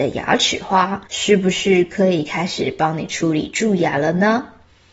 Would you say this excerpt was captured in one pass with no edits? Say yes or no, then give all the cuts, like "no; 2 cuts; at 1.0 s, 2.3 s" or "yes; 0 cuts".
no; 1 cut; at 1.1 s